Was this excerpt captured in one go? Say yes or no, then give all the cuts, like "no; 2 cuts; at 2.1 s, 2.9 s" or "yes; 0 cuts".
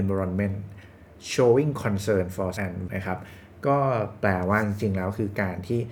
no; 2 cuts; at 2.6 s, 2.9 s